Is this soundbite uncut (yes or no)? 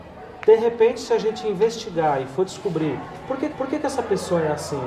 no